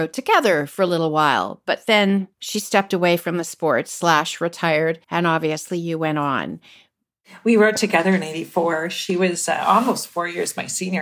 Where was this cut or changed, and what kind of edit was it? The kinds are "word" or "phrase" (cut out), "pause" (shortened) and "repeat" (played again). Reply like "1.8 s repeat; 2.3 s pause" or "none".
2.3 s pause; 5.0 s pause